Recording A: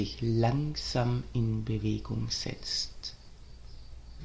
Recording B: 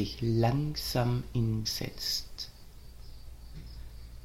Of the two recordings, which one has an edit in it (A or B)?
B